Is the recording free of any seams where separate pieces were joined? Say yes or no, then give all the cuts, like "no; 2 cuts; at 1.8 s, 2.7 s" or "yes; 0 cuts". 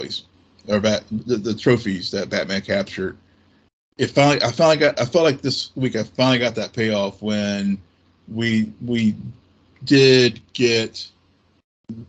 yes; 0 cuts